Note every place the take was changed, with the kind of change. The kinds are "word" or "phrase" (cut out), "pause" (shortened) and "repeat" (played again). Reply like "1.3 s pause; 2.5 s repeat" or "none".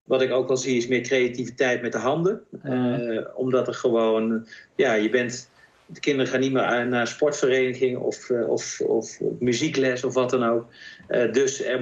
none